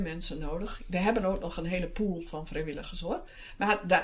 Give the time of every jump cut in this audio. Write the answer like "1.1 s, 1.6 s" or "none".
none